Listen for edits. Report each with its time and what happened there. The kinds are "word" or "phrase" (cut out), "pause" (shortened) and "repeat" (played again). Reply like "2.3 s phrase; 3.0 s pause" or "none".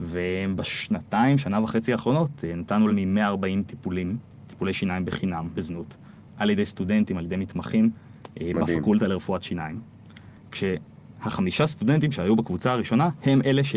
2.9 s word; 5.5 s word